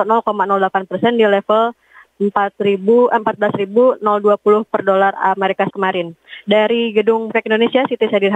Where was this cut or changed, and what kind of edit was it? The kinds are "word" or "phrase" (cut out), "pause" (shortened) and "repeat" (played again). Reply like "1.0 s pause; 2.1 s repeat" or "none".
5.7 s word; 7.3 s word